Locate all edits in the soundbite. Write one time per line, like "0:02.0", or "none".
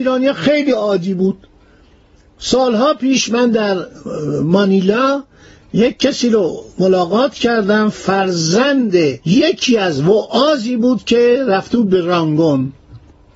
0:09.2